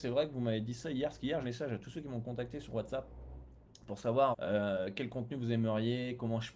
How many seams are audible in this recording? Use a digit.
2